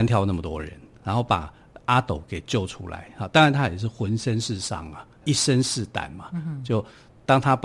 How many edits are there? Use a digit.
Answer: 1